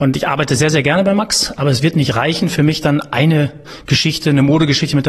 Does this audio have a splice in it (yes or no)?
no